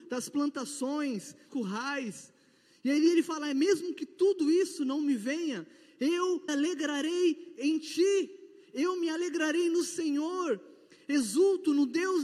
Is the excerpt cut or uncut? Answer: cut